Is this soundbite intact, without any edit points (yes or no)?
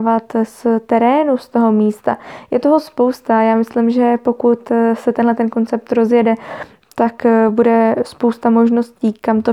yes